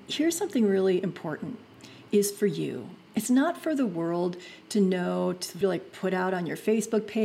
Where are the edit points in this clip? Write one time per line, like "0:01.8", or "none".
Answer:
0:02.1
0:05.6